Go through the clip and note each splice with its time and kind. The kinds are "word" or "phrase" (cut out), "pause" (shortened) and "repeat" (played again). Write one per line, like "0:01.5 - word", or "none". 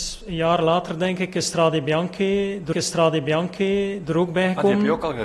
0:02.7 - repeat